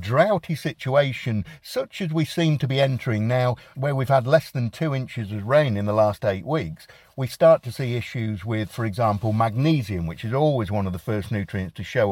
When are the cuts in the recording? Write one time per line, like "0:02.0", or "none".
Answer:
none